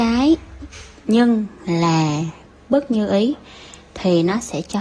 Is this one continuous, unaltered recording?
yes; 0 cuts

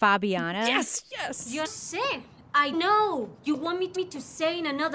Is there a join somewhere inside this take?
yes; 3 cuts; at 1.6 s, 2.7 s, 3.9 s

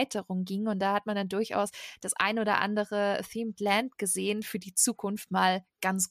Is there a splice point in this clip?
no; 0 cuts

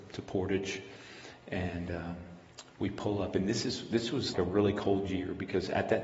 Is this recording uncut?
no; 2 cuts; at 2.7 s, 4.3 s

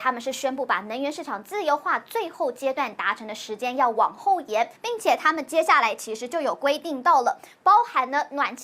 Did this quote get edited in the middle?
yes; 1 cut; at 4.7 s

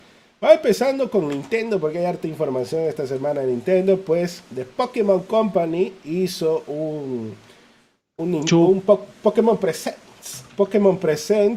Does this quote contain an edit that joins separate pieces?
no; 0 cuts

